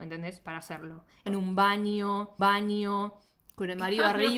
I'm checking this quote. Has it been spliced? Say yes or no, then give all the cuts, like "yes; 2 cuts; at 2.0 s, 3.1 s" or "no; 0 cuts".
yes; 2 cuts; at 1.3 s, 2.4 s